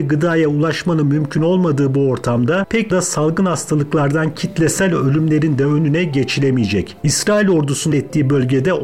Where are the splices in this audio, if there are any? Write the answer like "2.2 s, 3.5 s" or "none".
2.9 s, 7.9 s